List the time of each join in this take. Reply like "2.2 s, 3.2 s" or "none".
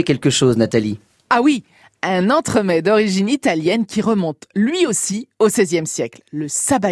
none